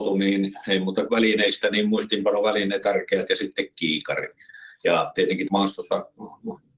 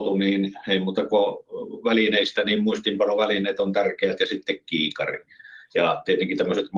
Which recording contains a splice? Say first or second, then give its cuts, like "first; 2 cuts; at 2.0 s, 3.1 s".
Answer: first; 3 cuts; at 1.1 s, 2.8 s, 5.5 s